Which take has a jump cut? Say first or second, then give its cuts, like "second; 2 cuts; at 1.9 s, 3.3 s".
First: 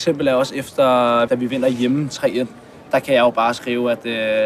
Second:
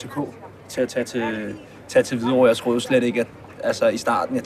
first; 1 cut; at 1.3 s